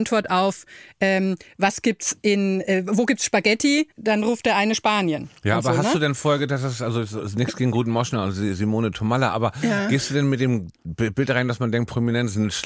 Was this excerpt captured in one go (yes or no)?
no